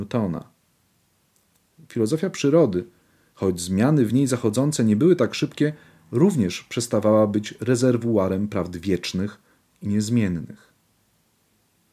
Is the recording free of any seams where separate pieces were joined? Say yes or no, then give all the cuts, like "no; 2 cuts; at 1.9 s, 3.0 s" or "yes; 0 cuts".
yes; 0 cuts